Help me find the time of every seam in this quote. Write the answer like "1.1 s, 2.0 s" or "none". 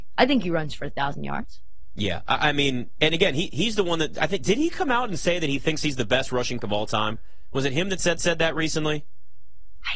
6.6 s, 8.2 s

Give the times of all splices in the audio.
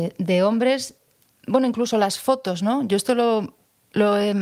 none

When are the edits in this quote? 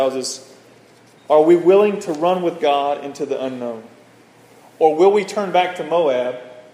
none

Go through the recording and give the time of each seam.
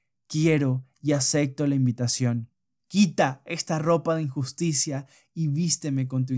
none

